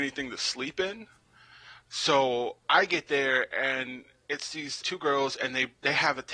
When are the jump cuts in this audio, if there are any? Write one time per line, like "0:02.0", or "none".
0:02.6
0:04.8

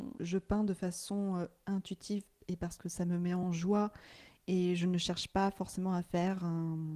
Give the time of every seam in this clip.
none

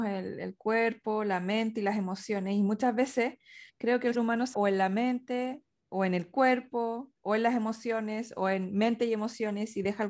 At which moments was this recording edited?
0:03.7
0:04.1
0:04.5

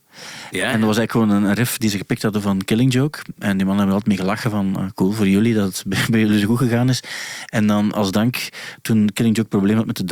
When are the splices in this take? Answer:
none

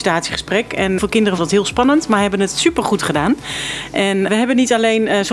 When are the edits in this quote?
0:01.0
0:01.4
0:04.3

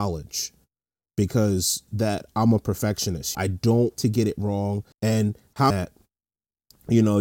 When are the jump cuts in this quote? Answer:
0:01.9
0:03.3
0:04.0
0:04.9
0:05.7

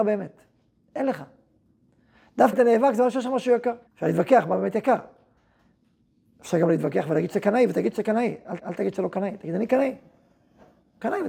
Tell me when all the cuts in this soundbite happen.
0:02.5
0:03.9
0:08.6

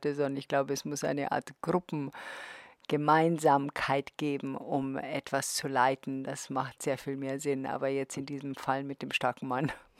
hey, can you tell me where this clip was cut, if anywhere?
none

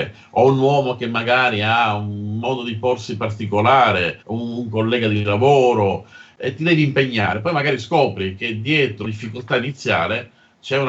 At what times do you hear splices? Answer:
0:04.2
0:09.0

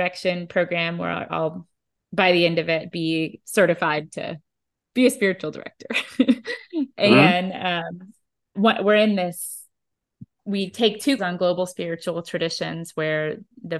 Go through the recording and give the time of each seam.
0:01.3
0:08.5
0:11.2

